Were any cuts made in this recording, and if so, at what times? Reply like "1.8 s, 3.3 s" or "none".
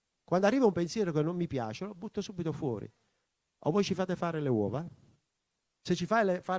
none